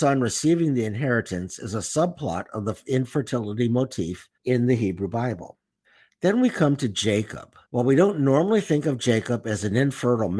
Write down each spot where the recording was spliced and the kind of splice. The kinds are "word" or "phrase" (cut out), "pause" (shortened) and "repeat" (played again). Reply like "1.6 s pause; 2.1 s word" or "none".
4.3 s pause; 5.8 s pause; 7.6 s pause